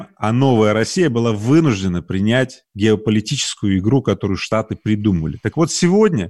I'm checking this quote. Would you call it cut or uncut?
uncut